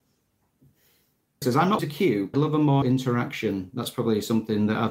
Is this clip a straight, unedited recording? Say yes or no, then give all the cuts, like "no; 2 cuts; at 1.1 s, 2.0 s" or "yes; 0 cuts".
no; 4 cuts; at 1.4 s, 1.8 s, 2.3 s, 2.8 s